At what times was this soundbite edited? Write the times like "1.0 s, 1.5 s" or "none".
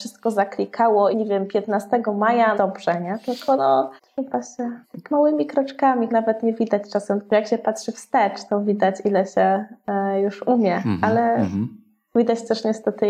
1.1 s, 2.5 s, 4.0 s, 4.8 s, 6.1 s, 8.5 s

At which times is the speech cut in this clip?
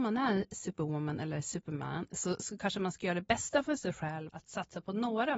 4.3 s

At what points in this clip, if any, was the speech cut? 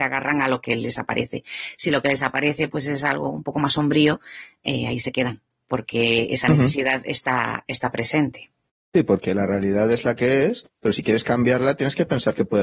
none

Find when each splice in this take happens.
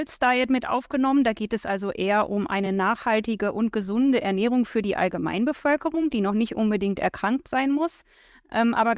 none

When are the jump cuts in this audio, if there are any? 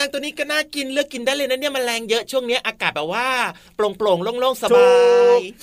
none

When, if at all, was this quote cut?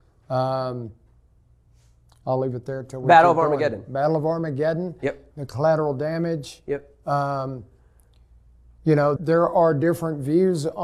9.2 s

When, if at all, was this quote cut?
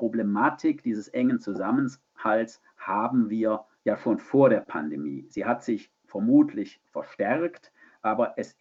6.0 s

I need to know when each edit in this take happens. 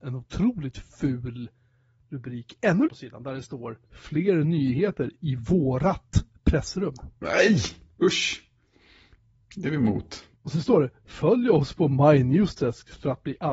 2.9 s, 3.8 s, 10.3 s

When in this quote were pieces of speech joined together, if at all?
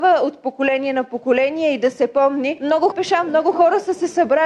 2.9 s

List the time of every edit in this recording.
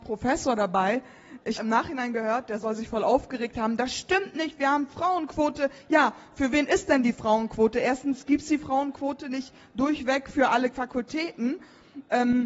1.6 s

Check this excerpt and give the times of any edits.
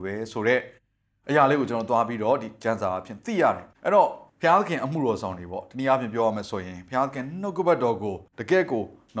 3.7 s, 4.3 s, 8.3 s

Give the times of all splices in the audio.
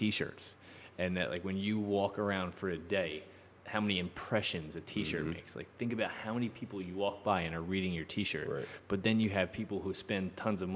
none

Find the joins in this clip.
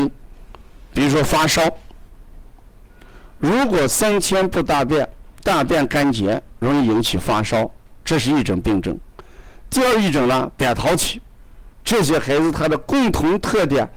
5.3 s, 11.7 s

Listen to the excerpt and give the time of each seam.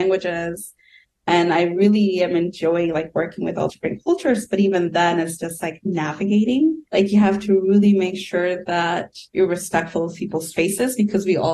3.7 s, 6.9 s, 9.3 s

